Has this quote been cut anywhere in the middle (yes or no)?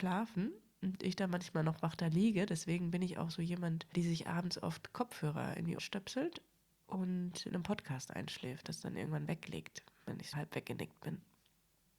yes